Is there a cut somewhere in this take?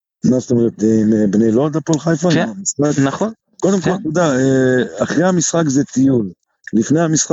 no; 0 cuts

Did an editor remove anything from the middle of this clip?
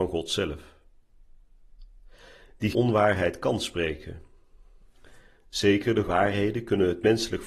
yes; 2 cuts; at 2.7 s, 6.1 s

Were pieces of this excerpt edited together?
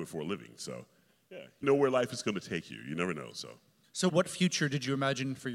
yes; 1 cut; at 1.6 s

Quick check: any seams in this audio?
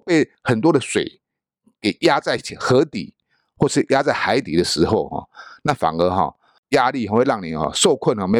no; 0 cuts

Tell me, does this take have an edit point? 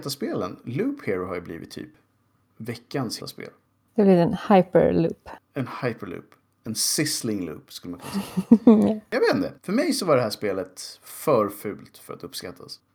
yes; 4 cuts; at 3.2 s, 3.6 s, 5.4 s, 9.6 s

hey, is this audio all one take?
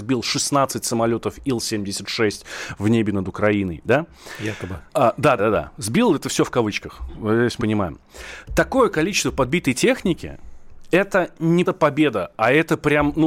no; 4 cuts; at 4.9 s, 5.4 s, 7.6 s, 11.7 s

